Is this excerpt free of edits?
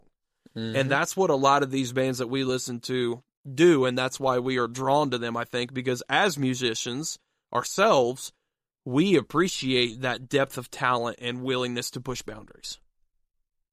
yes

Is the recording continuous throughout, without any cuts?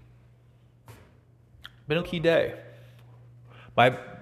no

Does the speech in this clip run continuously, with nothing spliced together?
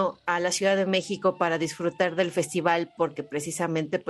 yes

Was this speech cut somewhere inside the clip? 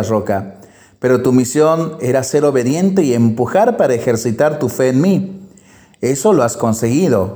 no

